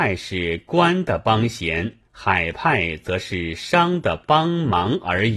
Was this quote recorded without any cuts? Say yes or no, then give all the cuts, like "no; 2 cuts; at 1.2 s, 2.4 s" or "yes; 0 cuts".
no; 1 cut; at 2.1 s